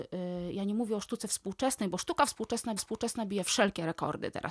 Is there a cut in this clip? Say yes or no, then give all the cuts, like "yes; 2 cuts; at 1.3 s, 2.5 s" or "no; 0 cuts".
yes; 1 cut; at 2.8 s